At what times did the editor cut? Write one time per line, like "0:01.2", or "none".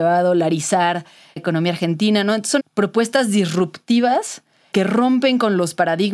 0:01.4
0:02.6
0:04.7